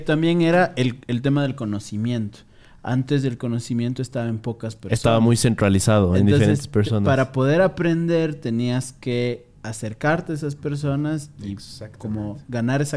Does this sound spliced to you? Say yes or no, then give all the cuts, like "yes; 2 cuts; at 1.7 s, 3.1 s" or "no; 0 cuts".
no; 0 cuts